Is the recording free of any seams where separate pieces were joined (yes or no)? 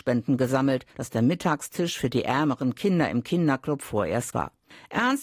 no